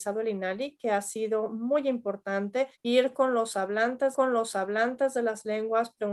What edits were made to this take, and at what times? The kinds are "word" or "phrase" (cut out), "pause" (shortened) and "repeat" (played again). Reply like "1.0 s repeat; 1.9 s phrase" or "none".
2.7 s pause; 4.1 s repeat